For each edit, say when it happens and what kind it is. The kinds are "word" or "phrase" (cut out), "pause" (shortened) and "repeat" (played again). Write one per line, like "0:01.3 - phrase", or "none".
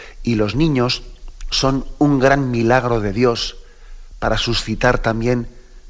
none